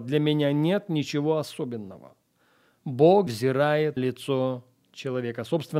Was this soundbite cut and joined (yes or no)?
yes